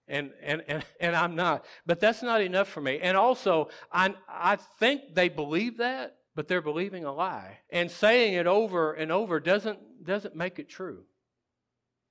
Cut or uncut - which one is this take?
cut